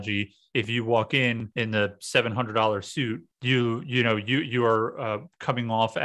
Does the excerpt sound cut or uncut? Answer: cut